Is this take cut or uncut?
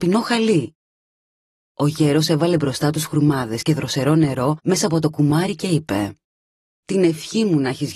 uncut